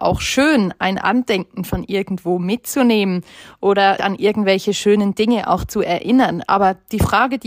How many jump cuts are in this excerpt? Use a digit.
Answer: 1